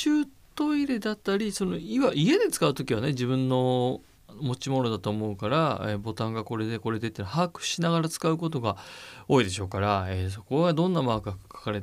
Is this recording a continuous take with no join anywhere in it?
no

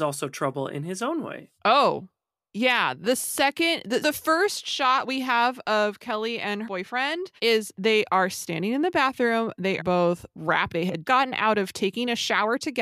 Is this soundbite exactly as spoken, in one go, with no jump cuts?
no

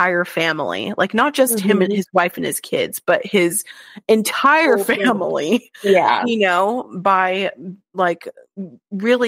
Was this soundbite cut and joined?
no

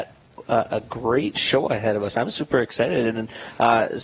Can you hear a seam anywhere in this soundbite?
no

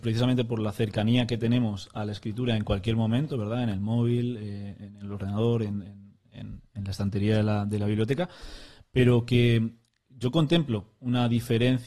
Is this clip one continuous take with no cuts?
yes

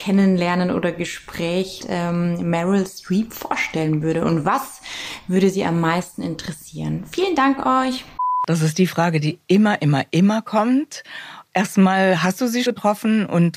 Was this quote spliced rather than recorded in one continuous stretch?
yes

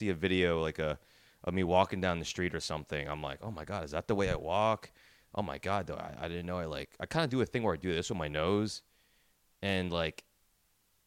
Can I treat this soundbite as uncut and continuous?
yes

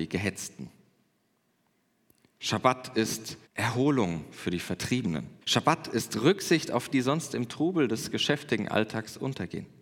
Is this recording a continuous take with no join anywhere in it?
no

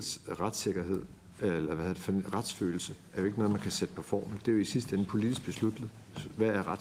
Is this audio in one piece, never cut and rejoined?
yes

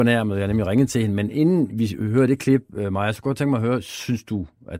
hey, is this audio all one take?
yes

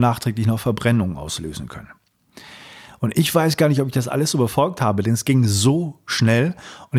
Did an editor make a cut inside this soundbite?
no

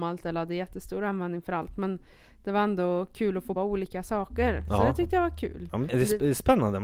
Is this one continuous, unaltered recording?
no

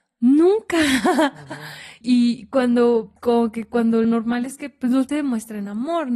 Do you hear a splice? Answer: yes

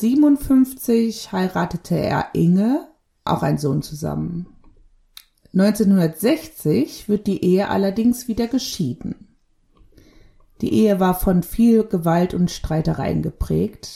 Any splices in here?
yes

